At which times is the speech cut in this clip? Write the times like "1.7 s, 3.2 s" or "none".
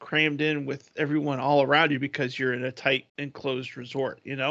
3.1 s